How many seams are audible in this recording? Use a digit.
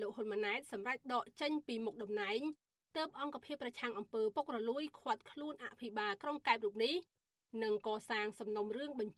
0